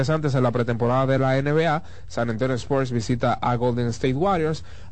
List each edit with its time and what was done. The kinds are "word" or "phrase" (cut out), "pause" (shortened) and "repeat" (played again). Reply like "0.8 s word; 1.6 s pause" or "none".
none